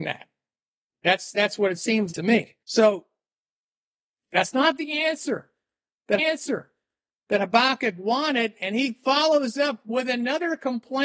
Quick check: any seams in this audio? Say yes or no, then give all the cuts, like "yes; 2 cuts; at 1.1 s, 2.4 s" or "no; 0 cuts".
yes; 3 cuts; at 2.1 s, 2.6 s, 6.2 s